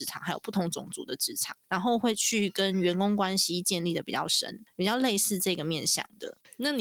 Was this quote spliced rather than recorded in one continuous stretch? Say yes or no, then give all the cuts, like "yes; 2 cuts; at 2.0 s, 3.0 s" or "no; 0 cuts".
no; 0 cuts